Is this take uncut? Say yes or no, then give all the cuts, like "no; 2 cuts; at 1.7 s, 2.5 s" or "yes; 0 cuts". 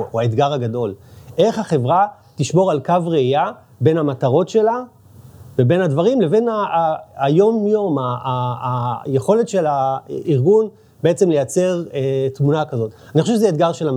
yes; 0 cuts